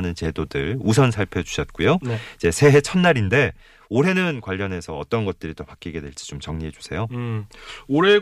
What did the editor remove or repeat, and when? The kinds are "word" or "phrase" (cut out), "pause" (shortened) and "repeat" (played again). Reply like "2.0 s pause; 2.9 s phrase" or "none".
none